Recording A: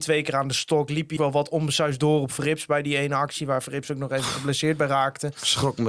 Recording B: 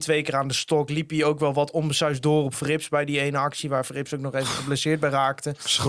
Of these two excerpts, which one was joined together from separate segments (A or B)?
A